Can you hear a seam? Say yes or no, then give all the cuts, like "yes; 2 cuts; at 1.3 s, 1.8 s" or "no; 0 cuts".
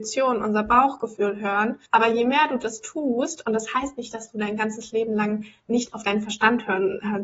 yes; 1 cut; at 1.9 s